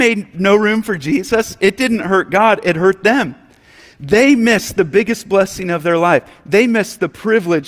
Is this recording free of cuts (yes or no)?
yes